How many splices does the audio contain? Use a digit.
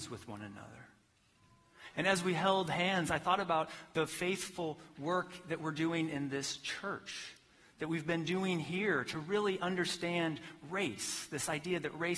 0